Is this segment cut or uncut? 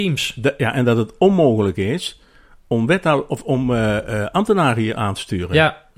uncut